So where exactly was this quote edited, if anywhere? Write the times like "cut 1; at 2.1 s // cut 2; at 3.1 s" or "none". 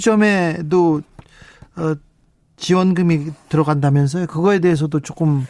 none